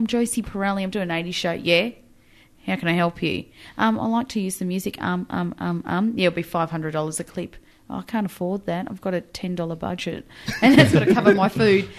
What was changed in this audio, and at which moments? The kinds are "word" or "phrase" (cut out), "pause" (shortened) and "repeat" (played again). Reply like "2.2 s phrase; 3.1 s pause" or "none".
none